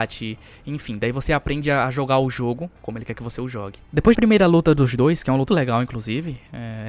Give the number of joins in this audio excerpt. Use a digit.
2